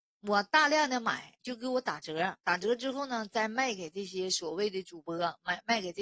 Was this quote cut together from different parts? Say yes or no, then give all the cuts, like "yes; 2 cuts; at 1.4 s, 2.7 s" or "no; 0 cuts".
yes; 2 cuts; at 1.4 s, 2.4 s